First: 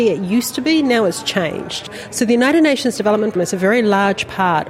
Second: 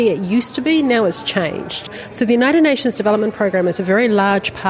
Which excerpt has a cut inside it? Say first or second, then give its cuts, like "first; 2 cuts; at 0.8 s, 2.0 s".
first; 1 cut; at 3.4 s